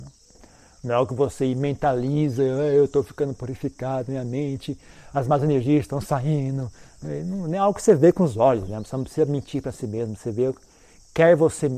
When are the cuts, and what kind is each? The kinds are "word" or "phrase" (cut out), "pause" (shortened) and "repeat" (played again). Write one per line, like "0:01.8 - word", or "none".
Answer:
none